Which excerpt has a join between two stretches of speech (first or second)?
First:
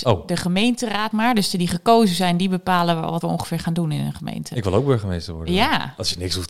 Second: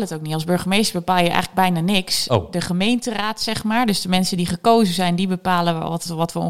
first